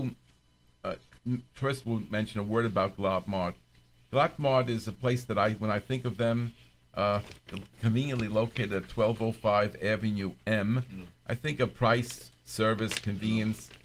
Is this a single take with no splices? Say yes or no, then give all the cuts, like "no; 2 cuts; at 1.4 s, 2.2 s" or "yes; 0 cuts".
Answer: yes; 0 cuts